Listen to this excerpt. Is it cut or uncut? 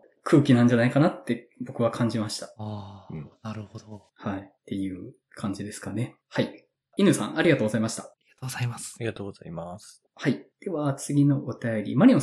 uncut